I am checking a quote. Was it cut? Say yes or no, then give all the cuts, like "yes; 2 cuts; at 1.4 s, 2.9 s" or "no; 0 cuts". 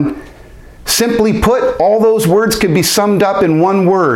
no; 0 cuts